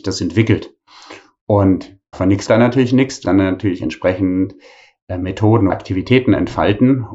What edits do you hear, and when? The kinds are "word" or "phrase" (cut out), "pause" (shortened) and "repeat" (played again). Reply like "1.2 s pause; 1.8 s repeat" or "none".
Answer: 2.1 s word; 2.5 s word; 3.2 s word; 5.7 s word